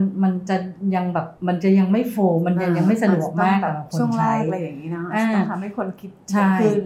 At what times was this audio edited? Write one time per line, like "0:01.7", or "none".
0:01.4